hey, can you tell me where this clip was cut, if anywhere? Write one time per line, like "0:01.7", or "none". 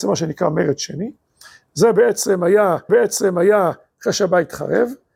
0:02.9